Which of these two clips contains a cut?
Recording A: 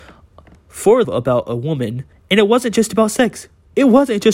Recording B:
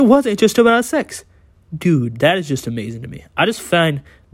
A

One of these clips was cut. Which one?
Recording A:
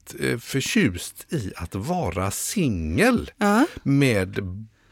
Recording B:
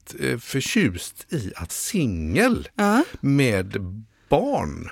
B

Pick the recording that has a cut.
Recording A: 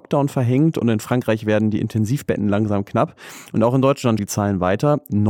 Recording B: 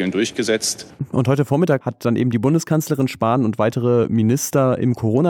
A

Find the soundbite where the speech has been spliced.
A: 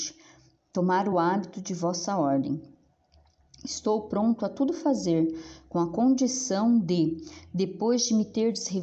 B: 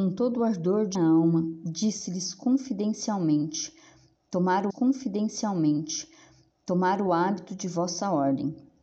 B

